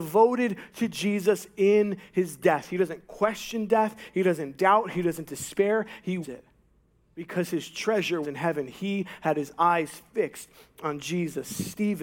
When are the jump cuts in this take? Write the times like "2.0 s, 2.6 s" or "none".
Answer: 6.2 s, 8.2 s